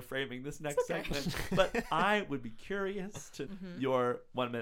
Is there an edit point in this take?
yes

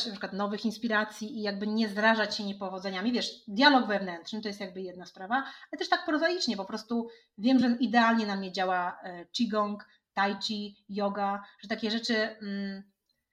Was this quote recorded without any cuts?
yes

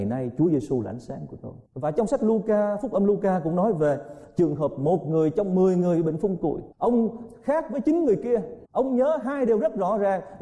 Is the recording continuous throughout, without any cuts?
no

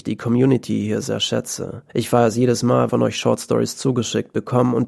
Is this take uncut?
no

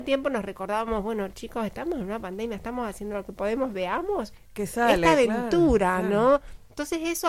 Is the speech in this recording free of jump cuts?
yes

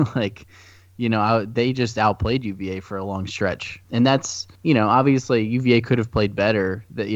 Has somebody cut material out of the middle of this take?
yes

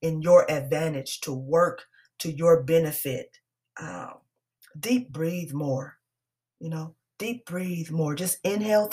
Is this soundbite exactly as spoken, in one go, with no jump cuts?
yes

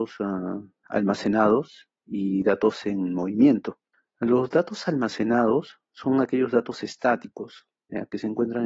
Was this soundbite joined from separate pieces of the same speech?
yes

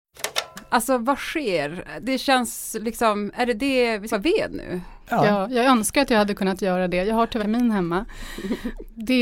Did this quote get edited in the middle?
yes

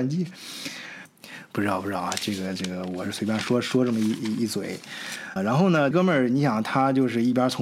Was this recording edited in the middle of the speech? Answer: yes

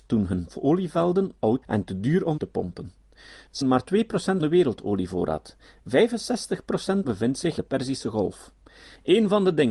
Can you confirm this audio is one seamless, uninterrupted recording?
no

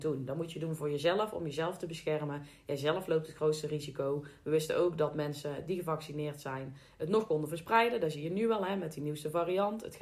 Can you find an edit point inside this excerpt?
no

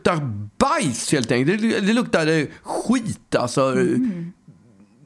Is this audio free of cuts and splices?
yes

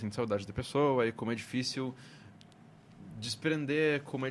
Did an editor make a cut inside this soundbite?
no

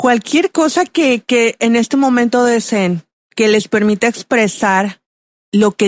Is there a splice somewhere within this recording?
no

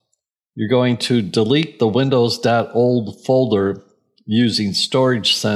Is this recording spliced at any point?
no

